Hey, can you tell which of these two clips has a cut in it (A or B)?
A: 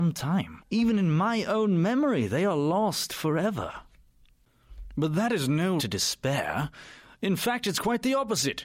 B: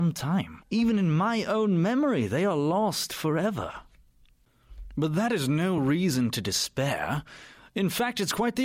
A